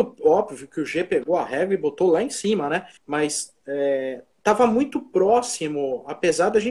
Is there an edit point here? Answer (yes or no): yes